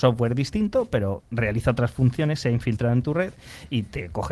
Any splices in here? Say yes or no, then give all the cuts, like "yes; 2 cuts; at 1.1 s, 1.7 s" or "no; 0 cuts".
yes; 1 cut; at 1.2 s